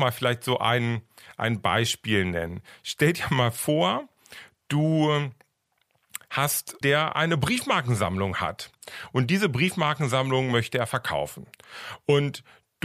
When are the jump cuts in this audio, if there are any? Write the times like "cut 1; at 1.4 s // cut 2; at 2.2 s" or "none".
cut 1; at 6.8 s